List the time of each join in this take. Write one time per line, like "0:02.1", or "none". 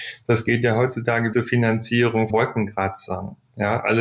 0:01.3
0:02.3